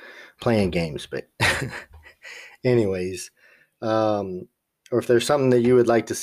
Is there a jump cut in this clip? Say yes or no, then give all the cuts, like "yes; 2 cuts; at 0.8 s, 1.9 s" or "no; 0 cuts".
no; 0 cuts